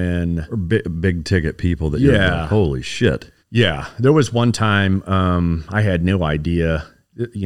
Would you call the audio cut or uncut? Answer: cut